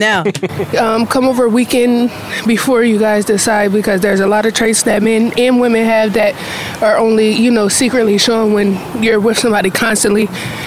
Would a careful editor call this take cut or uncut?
uncut